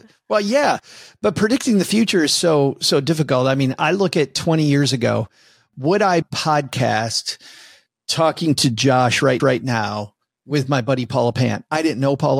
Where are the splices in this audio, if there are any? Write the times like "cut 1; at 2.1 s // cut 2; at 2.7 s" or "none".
cut 1; at 6.2 s // cut 2; at 9.4 s